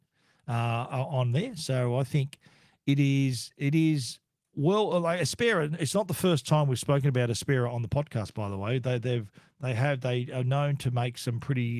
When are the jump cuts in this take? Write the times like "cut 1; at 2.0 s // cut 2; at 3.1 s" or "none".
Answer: none